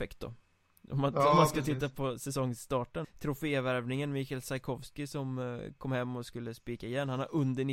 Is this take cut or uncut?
cut